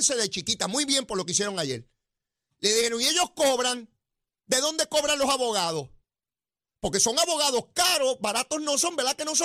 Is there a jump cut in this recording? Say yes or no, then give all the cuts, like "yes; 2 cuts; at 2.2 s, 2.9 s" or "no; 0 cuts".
no; 0 cuts